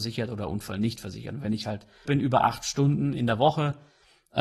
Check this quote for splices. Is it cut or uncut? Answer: cut